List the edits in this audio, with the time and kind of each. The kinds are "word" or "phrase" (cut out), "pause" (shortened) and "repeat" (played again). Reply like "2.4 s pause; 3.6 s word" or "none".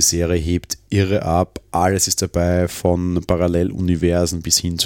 none